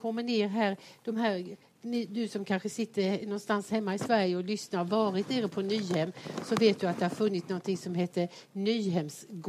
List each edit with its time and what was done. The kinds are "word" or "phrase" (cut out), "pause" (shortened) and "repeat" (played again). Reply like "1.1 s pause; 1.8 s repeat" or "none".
none